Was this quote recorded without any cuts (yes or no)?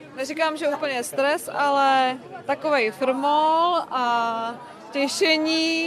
yes